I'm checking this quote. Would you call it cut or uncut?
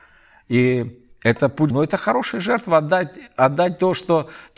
cut